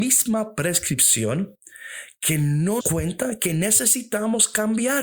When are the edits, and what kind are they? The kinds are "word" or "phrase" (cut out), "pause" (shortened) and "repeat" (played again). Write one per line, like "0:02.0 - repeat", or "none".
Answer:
0:02.8 - phrase